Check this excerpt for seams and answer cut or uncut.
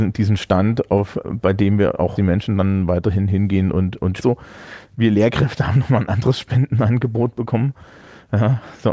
cut